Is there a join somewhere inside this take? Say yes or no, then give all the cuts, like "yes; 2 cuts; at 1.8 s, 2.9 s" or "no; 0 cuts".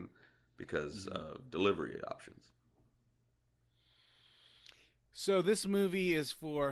no; 0 cuts